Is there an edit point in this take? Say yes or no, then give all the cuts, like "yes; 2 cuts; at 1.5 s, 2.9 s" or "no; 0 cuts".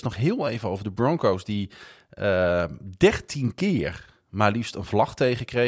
no; 0 cuts